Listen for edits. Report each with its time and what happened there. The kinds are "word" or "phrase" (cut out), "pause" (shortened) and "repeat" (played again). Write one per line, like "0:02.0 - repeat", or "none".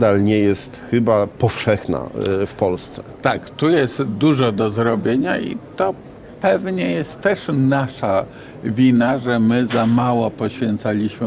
none